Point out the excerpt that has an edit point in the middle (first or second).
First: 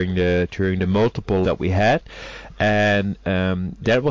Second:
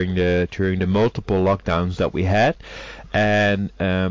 first